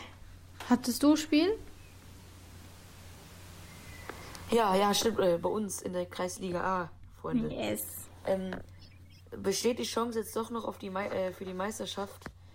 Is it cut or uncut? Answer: uncut